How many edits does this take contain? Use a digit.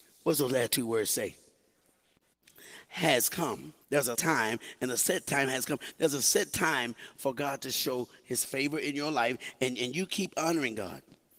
2